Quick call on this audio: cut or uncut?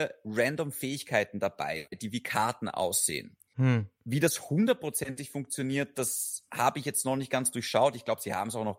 cut